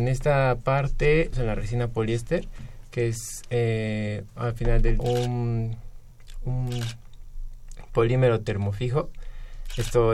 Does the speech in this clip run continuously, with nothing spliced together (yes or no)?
no